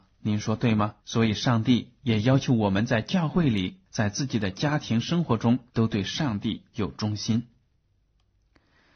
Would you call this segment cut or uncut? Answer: cut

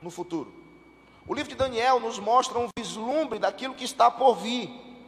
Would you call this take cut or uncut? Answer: uncut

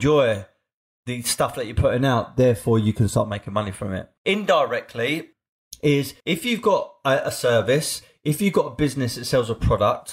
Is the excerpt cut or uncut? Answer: cut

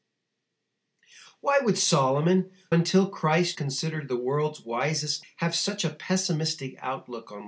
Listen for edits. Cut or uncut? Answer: cut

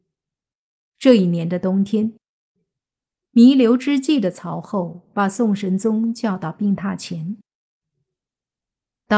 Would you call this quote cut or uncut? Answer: uncut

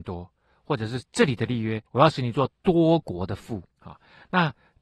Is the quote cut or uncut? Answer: cut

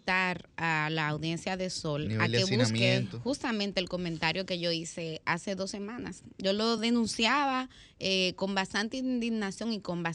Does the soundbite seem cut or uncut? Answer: uncut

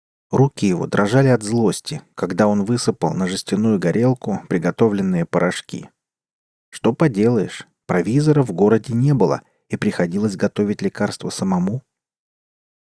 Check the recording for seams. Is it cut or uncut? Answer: uncut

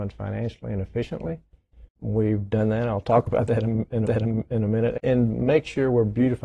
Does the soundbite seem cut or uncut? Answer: cut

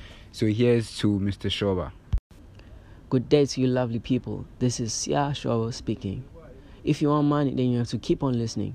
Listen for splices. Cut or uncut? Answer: uncut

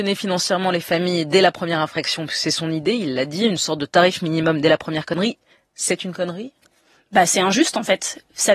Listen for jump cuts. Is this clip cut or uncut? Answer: uncut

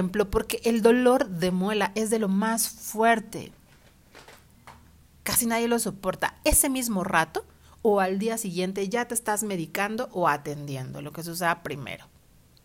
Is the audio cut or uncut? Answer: uncut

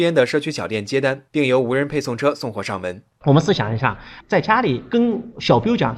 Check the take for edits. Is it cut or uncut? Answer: cut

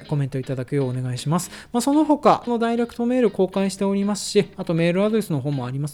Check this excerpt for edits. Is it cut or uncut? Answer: cut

